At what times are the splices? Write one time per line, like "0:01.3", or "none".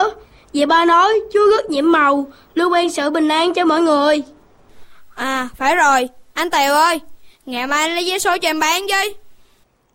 none